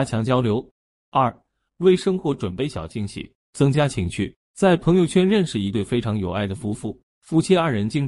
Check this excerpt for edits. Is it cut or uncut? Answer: uncut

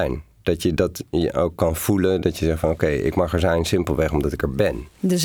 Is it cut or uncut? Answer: uncut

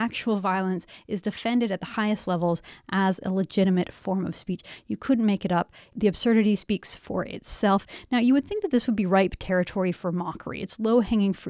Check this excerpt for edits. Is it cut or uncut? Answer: uncut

